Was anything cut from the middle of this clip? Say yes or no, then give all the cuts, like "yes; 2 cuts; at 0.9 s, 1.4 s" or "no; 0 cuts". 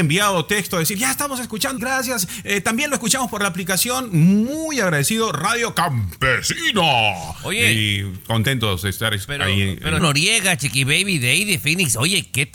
yes; 2 cuts; at 1.8 s, 10.0 s